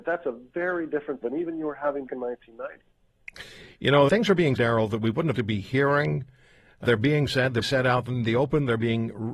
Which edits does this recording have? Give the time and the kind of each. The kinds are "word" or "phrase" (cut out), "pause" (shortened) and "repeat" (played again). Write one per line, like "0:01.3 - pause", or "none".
0:01.2 - word
0:02.1 - word
0:04.1 - word
0:04.6 - word
0:05.3 - word
0:06.8 - word
0:07.6 - word